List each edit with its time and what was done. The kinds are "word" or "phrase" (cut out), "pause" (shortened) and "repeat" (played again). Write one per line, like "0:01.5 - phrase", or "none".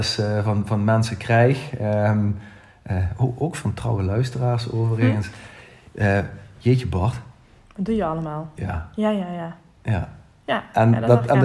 none

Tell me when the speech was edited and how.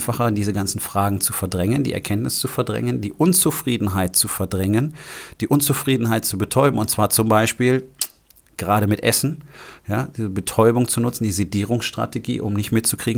none

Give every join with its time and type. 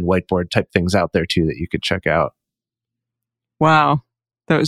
none

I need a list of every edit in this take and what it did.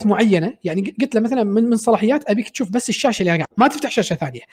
0:03.4 - word

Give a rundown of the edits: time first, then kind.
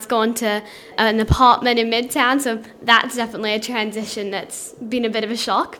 none

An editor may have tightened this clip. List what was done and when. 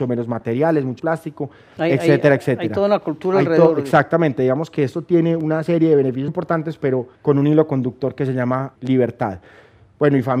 0:01.0 - word
0:01.8 - word
0:06.3 - word
0:07.1 - pause
0:08.7 - word

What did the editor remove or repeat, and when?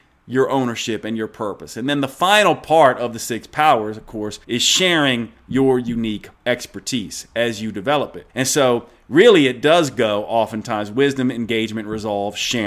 0:04.4 - pause
0:06.3 - pause
0:08.3 - pause

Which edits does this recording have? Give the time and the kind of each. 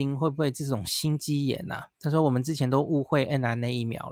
0:01.9 - pause

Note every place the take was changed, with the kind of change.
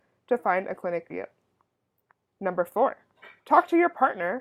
0:01.1 - word
0:03.4 - pause

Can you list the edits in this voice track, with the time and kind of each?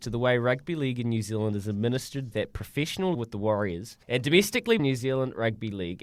0:02.3 - word
0:03.1 - word
0:04.0 - pause
0:04.8 - word

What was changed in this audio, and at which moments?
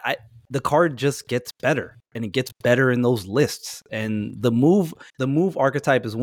0:05.1 - pause

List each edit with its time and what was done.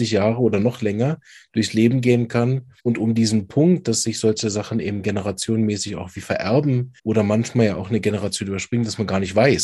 0:02.8 - pause
0:07.0 - pause

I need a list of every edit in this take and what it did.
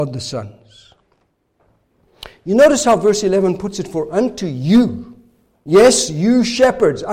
none

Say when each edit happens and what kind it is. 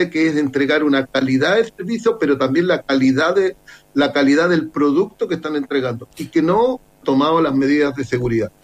0:06.9 - pause

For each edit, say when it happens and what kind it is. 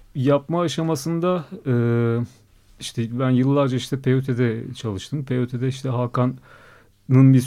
0:02.5 - pause

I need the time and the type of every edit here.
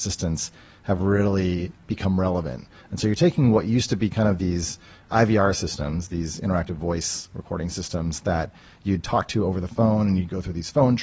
none

